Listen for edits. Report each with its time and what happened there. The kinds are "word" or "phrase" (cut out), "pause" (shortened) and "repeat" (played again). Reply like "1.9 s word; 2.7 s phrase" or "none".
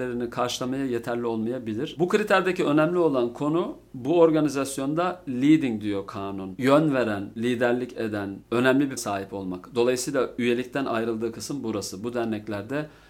9.0 s word